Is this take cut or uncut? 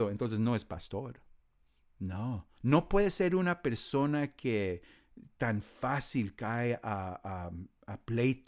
cut